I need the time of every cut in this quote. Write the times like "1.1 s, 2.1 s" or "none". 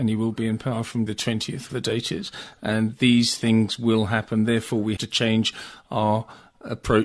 1.1 s, 1.7 s, 5.0 s